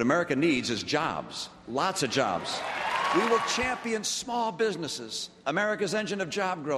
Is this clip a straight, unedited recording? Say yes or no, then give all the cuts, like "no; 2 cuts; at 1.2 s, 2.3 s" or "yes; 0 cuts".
yes; 0 cuts